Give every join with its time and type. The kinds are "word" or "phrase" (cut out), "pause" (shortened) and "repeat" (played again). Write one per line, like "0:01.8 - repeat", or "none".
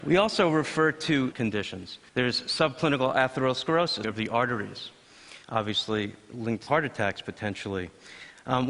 0:01.3 - word
0:02.1 - pause
0:04.0 - phrase
0:05.4 - pause
0:06.7 - word